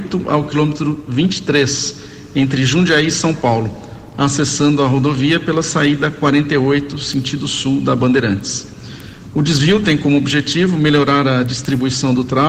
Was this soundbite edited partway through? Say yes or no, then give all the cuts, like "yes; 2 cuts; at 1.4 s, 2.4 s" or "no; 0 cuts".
no; 0 cuts